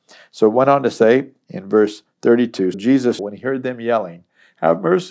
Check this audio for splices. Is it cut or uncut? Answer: cut